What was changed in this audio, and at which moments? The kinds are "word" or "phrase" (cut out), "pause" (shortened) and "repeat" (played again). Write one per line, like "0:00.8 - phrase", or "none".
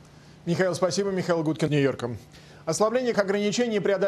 0:01.7 - word
0:03.1 - word